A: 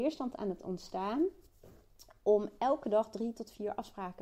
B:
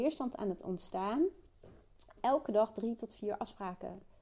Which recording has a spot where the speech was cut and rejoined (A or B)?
B